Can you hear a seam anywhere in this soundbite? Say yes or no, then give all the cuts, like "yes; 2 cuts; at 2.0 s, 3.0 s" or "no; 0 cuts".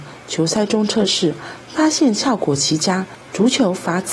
yes; 1 cut; at 3.2 s